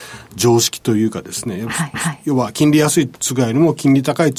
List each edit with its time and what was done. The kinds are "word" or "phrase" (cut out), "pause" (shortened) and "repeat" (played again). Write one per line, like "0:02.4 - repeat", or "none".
0:01.9 - repeat

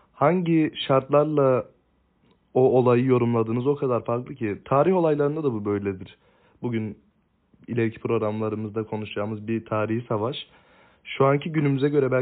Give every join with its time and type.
none

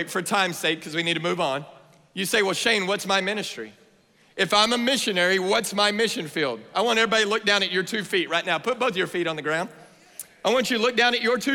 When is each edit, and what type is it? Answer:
none

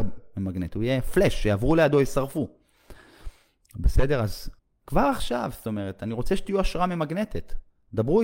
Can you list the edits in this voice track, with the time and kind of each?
0:04.6 - pause

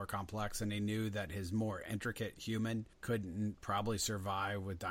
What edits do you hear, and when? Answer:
0:02.9 - pause

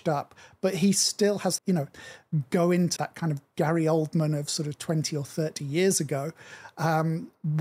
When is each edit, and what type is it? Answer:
0:01.6 - phrase
0:03.0 - word

